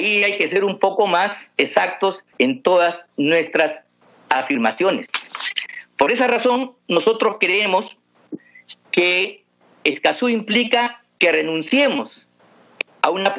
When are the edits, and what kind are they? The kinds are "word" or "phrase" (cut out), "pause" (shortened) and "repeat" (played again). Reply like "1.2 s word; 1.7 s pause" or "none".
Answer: 2.3 s pause